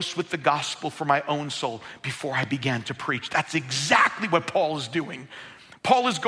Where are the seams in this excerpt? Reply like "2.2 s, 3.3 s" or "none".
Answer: none